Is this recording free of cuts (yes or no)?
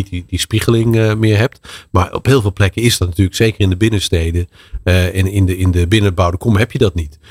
yes